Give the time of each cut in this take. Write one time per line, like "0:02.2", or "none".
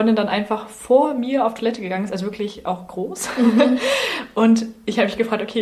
none